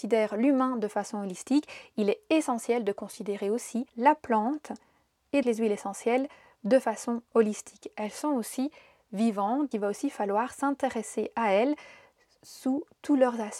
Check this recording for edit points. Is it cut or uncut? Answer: cut